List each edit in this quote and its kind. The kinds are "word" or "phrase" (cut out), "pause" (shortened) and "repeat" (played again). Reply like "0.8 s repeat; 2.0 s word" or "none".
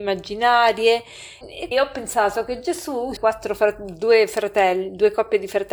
1.4 s word; 1.7 s word; 3.2 s word